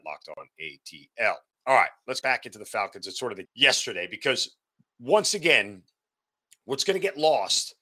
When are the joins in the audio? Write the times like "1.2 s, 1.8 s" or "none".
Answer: 2.2 s, 3.4 s